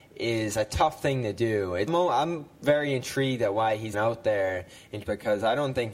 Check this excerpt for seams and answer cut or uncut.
cut